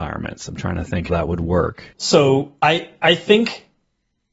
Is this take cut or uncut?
cut